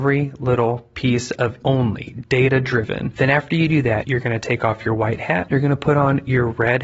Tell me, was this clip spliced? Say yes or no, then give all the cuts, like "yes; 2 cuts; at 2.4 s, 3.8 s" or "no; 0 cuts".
yes; 1 cut; at 1.6 s